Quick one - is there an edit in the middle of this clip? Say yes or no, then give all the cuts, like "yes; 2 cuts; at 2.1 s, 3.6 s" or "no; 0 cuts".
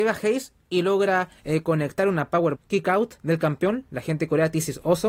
yes; 3 cuts; at 1.4 s, 2.5 s, 3.2 s